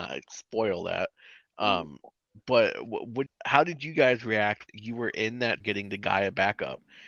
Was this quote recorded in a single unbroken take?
no; 3 cuts; at 3.3 s, 4.7 s, 5.6 s

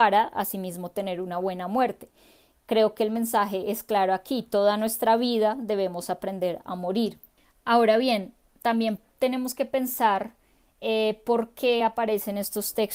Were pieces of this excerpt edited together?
no; 0 cuts

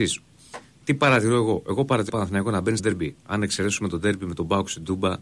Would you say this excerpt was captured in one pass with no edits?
no; 3 cuts; at 2.1 s, 2.8 s, 3.2 s

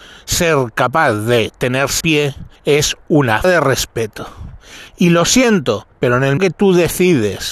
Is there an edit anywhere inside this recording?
yes; 6 cuts; at 2.0 s, 2.6 s, 3.4 s, 4.9 s, 5.9 s, 6.4 s

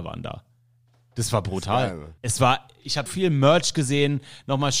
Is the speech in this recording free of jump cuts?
no; 2 cuts; at 2.2 s, 3.1 s

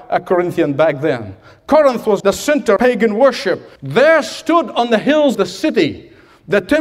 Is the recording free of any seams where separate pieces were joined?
no; 4 cuts; at 2.2 s, 2.8 s, 3.8 s, 5.3 s

